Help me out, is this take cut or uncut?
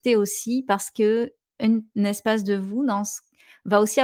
uncut